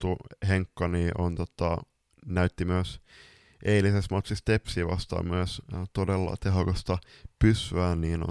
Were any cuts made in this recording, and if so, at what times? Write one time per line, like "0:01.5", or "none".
none